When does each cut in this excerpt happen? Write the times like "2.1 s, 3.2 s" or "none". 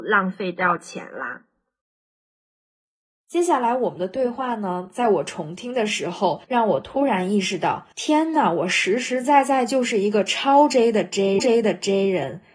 1.8 s, 6.4 s, 7.9 s, 11.4 s

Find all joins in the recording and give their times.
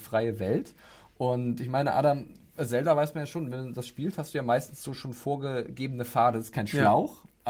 none

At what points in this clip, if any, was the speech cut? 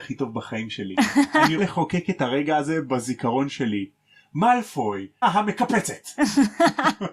1.6 s, 5.2 s

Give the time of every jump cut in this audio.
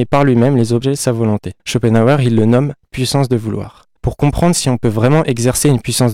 1.6 s, 4.0 s

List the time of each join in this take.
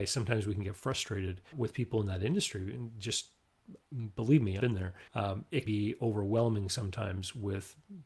1.5 s, 4.6 s, 5.1 s, 5.7 s

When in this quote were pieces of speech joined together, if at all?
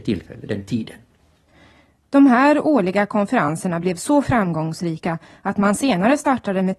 none

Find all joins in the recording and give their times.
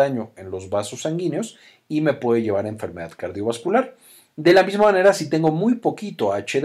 none

